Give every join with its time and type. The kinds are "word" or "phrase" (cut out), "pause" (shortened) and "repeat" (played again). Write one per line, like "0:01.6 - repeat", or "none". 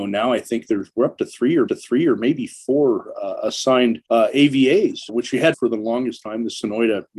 0:01.7 - repeat
0:04.0 - pause
0:05.1 - word
0:05.5 - word